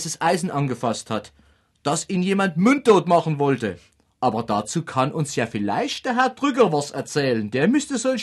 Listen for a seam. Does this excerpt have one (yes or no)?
no